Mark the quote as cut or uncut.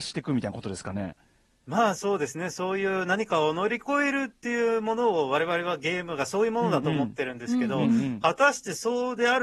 uncut